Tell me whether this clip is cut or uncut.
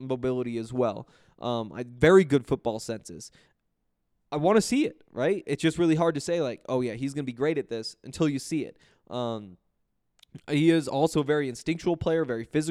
uncut